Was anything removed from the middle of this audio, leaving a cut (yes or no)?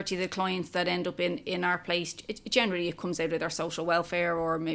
no